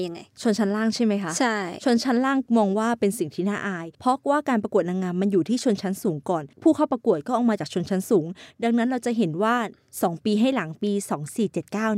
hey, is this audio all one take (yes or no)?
no